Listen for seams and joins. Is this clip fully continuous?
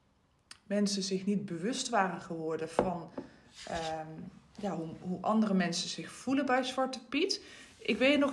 yes; 0 cuts

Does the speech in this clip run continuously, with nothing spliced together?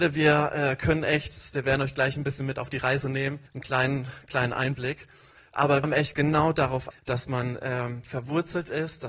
no; 4 cuts; at 3.5 s, 5.8 s, 6.1 s, 6.9 s

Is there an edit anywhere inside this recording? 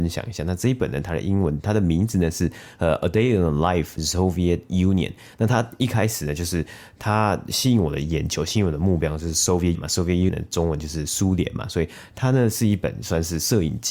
yes; 3 cuts; at 4.0 s, 9.7 s, 10.3 s

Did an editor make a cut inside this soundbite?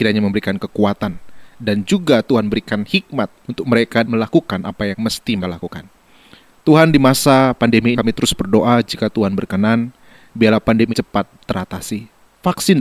yes; 6 cuts; at 3.4 s, 4.0 s, 4.9 s, 5.4 s, 7.9 s, 10.9 s

